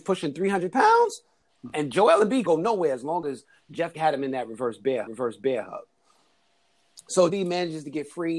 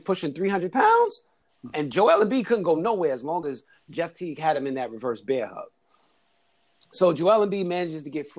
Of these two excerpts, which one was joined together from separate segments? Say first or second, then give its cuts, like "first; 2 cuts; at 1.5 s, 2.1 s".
first; 4 cuts; at 2.4 s, 3.9 s, 5.1 s, 7.3 s